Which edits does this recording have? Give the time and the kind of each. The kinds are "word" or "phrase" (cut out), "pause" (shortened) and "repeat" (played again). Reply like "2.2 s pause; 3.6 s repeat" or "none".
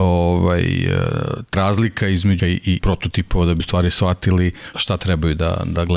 1.5 s word; 2.4 s word; 2.8 s word; 3.6 s word; 4.7 s word

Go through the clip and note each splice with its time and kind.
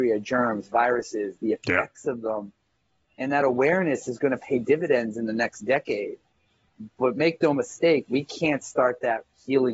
none

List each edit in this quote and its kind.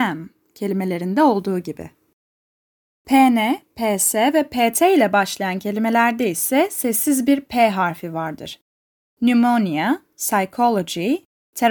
none

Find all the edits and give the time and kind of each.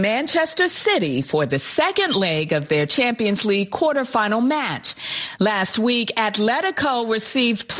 none

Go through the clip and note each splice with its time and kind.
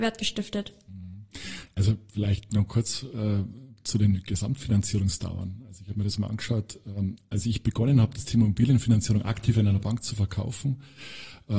none

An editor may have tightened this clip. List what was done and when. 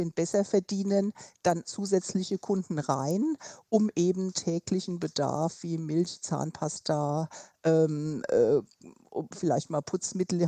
1.6 s phrase

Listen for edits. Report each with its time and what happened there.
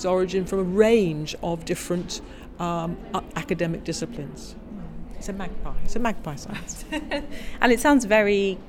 none

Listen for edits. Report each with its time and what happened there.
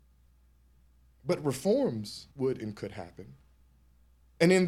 2.3 s pause

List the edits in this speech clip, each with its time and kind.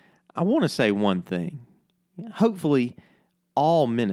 none

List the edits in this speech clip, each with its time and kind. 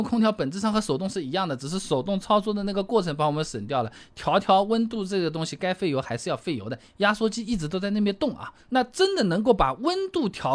8.6 s pause

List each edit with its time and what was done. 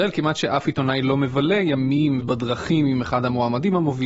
2.2 s word

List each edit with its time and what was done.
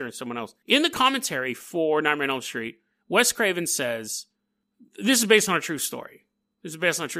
none

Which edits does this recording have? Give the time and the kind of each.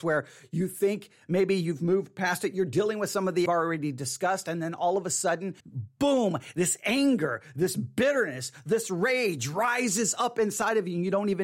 3.5 s phrase; 5.6 s pause

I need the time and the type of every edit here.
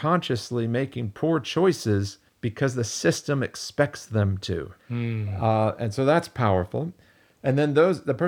2.3 s pause; 4.8 s pause

